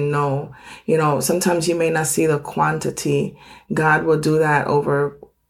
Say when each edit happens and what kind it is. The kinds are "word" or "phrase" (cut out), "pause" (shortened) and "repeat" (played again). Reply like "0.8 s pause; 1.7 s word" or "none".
none